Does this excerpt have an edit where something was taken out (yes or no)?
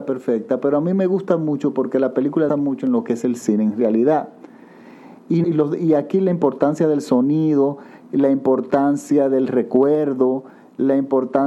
yes